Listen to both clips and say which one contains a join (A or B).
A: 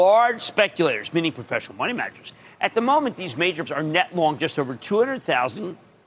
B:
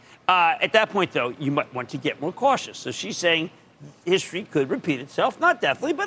A